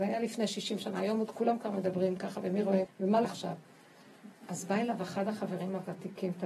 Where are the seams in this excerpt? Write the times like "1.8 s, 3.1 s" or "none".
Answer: 2.8 s, 3.2 s